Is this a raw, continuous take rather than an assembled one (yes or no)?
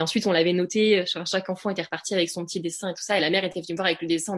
yes